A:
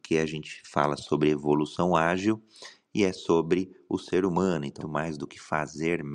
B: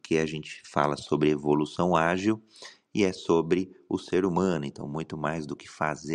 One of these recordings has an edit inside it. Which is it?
A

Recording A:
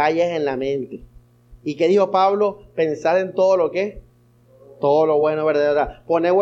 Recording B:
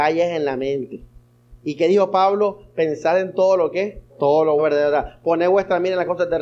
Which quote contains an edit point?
B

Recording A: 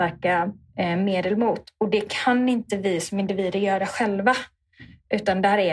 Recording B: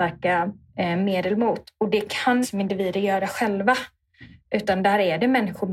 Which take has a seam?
B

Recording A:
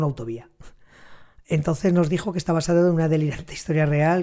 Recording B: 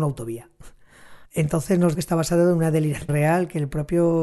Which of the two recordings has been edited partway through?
B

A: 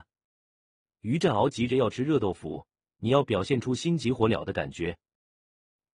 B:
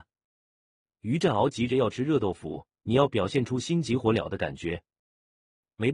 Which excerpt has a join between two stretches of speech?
B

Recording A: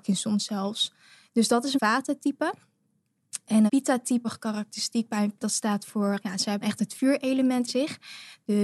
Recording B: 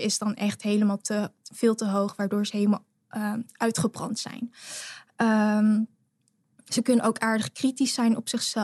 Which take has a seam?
A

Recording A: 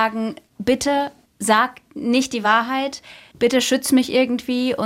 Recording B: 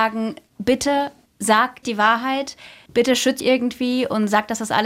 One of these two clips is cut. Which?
B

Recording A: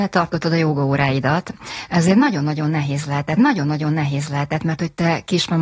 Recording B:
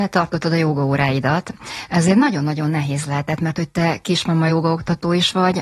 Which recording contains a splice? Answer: A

